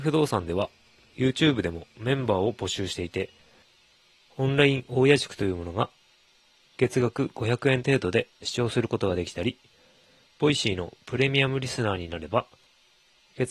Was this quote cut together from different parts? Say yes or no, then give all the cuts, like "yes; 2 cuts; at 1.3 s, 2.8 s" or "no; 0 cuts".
no; 0 cuts